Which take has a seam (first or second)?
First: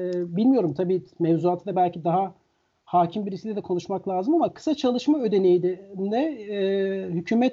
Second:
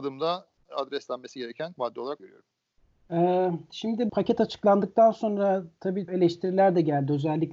second